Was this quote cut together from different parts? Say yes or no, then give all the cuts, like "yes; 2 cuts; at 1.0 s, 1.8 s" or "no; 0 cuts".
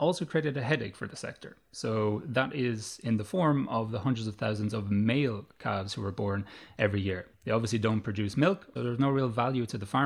yes; 2 cuts; at 7.3 s, 8.8 s